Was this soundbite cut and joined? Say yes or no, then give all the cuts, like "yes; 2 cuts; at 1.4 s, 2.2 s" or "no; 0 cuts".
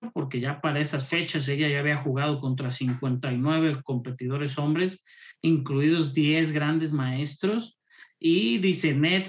no; 0 cuts